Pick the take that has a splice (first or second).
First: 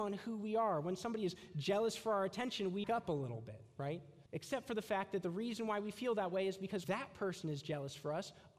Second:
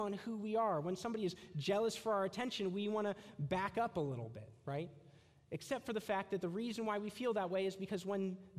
first